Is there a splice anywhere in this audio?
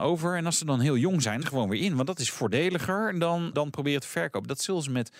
yes; 2 cuts; at 1.4 s, 3.5 s

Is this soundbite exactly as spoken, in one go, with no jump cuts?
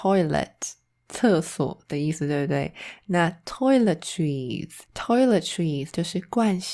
no; 1 cut; at 4.8 s

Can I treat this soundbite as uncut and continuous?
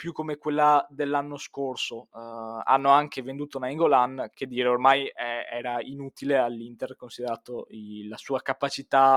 no; 1 cut; at 4.3 s

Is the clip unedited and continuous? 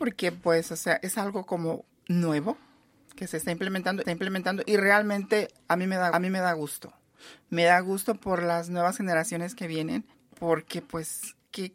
no; 3 cuts; at 4.0 s, 6.1 s, 10.1 s

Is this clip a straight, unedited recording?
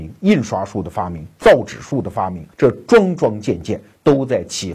no; 1 cut; at 2.5 s

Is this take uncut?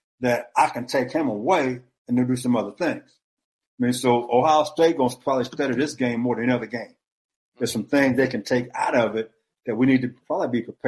yes; 0 cuts

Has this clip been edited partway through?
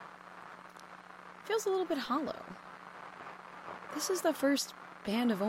no; 0 cuts

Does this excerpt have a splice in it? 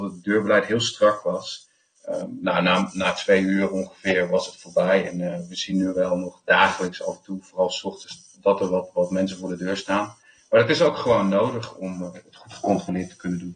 no; 0 cuts

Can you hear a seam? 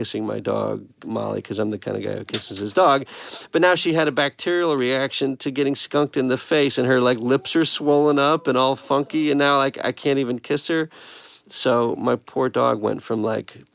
no; 0 cuts

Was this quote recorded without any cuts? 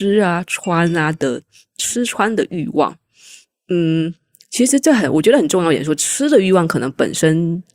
yes; 0 cuts

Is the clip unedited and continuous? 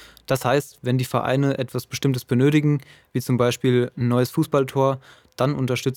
yes; 0 cuts

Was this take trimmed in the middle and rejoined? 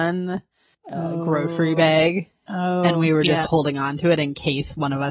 yes; 1 cut; at 3.4 s

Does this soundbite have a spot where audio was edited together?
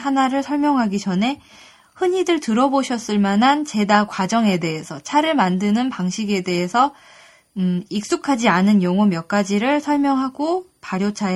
no; 0 cuts

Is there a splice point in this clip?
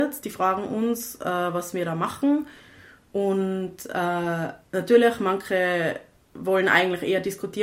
yes; 1 cut; at 4.6 s

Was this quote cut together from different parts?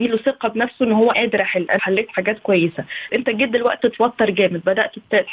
yes; 4 cuts; at 1.1 s, 1.8 s, 3.1 s, 3.8 s

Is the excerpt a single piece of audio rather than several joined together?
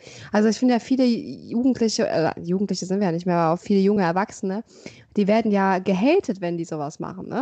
yes; 0 cuts

